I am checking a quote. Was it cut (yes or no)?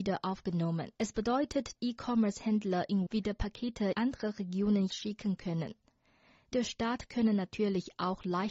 yes